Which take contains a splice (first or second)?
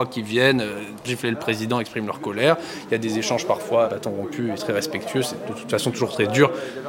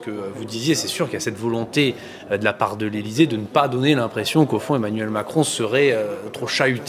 first